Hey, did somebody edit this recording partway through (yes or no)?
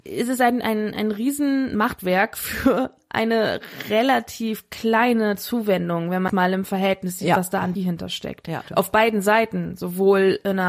yes